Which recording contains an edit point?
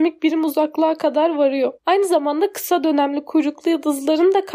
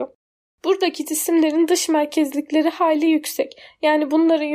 first; 1 cut; at 1.8 s

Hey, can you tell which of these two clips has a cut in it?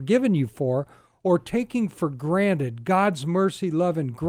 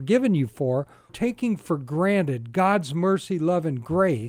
second; 1 cut; at 1.1 s

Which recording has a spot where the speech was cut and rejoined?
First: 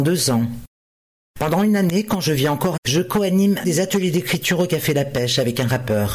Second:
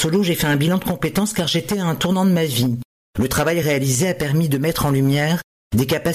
first; 2 cuts; at 2.8 s, 3.6 s

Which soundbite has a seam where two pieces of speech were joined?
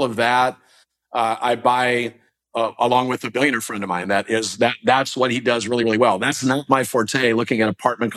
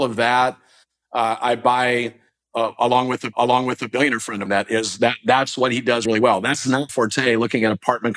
second; 4 cuts; at 3.3 s, 4.5 s, 6.1 s, 6.9 s

